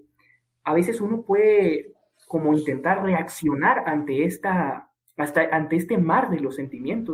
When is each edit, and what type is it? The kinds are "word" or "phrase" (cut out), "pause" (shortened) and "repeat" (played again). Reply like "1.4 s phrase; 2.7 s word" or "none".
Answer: none